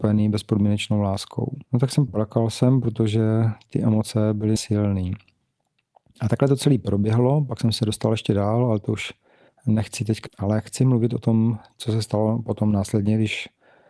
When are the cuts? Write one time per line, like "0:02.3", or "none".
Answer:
0:01.7
0:02.1
0:04.6
0:09.5
0:10.3